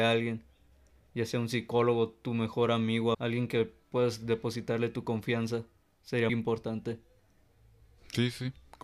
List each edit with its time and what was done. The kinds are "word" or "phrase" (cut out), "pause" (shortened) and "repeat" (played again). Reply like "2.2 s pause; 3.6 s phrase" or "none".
3.1 s word; 6.3 s word

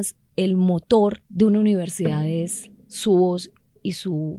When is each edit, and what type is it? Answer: 1.3 s pause

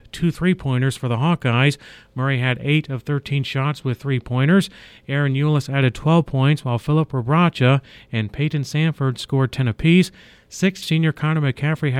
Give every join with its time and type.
10.8 s word

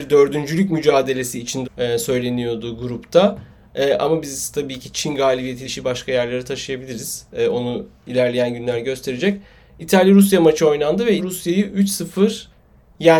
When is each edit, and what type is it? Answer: 1.6 s word; 5.6 s word; 11.2 s word

